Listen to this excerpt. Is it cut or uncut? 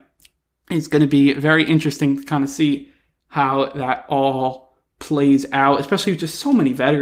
uncut